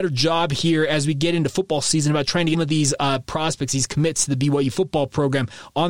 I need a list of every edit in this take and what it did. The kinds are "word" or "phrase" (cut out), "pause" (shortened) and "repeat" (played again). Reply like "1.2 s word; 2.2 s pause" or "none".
2.5 s phrase